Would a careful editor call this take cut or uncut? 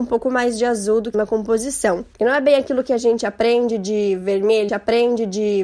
cut